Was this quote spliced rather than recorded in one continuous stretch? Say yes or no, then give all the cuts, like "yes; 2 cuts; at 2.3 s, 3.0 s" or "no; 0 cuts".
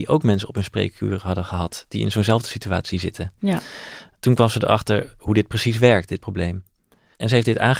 no; 0 cuts